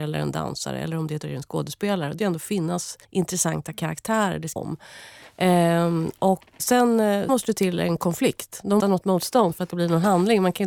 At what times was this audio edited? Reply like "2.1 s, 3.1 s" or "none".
1.2 s, 2.2 s, 3.0 s, 4.6 s, 6.6 s, 7.3 s, 8.8 s, 9.7 s